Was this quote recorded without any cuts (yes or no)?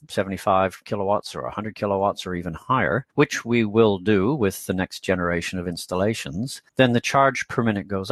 no